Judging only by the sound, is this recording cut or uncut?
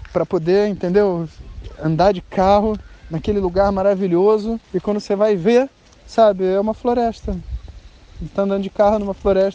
cut